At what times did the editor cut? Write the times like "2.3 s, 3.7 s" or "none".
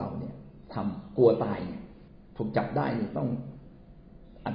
2.1 s